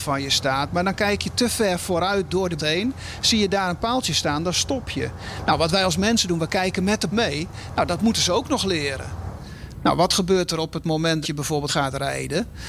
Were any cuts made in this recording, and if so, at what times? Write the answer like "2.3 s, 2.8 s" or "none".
2.6 s, 7.1 s, 11.2 s, 11.7 s